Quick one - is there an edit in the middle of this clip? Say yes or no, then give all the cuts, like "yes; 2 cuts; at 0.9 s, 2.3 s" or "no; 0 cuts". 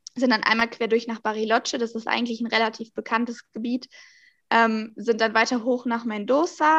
no; 0 cuts